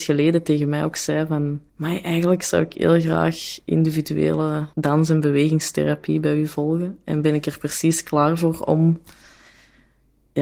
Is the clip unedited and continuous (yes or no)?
no